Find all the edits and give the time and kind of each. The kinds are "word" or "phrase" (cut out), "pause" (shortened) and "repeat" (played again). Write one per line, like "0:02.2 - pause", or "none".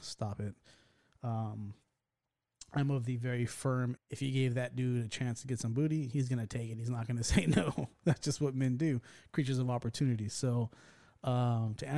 0:04.0 - phrase